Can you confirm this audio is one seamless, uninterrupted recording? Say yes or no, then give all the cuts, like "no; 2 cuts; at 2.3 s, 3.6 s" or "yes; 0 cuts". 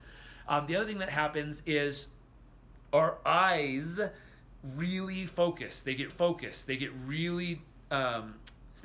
no; 1 cut; at 6.1 s